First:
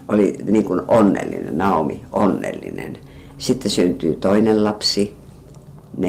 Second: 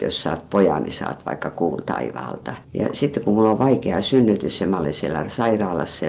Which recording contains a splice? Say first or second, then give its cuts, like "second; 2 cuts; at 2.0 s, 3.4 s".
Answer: second; 1 cut; at 2.6 s